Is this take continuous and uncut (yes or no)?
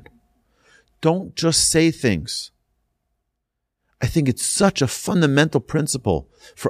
yes